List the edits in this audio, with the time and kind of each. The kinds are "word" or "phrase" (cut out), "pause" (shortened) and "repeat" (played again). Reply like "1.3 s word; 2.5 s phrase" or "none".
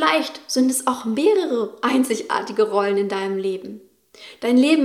none